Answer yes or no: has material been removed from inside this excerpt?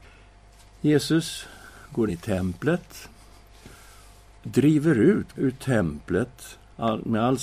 yes